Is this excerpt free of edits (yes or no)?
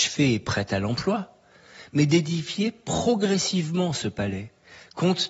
yes